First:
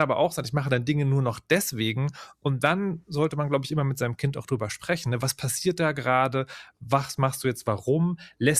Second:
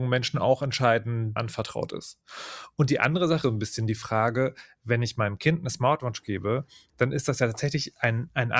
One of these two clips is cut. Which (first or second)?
second